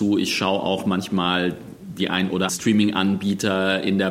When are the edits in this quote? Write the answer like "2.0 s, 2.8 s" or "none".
2.5 s